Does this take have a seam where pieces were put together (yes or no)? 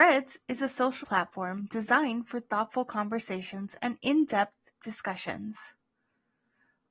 yes